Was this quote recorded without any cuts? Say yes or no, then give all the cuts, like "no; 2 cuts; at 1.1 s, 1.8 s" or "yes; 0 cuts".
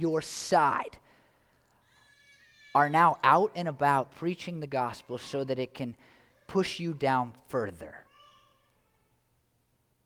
yes; 0 cuts